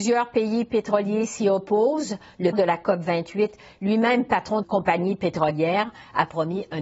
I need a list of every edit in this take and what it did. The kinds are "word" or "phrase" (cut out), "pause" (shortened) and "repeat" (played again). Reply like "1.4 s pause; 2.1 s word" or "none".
2.5 s word; 4.6 s word